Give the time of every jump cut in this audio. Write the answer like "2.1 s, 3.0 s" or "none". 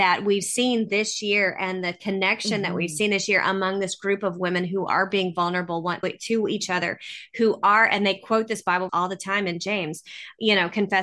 6.0 s, 8.9 s